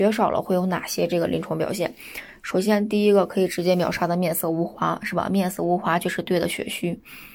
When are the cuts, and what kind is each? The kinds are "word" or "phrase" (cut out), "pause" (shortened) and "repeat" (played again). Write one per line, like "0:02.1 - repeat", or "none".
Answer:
none